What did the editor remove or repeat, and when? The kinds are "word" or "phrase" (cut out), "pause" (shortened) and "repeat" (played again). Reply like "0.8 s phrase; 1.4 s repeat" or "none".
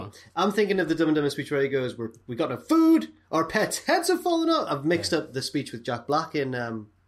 none